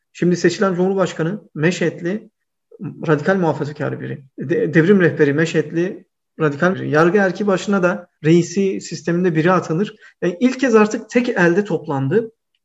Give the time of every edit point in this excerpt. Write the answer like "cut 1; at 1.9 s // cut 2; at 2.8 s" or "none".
cut 1; at 4.3 s // cut 2; at 6.7 s // cut 3; at 8.2 s